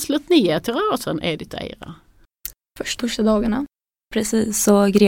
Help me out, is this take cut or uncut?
cut